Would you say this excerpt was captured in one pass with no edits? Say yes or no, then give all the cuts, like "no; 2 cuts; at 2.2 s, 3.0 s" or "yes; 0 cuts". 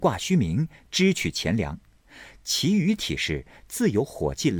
yes; 0 cuts